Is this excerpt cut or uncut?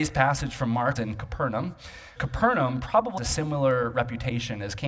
cut